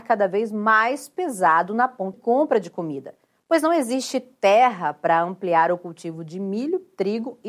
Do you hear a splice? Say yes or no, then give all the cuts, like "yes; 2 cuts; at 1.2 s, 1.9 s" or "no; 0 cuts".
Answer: yes; 1 cut; at 2.1 s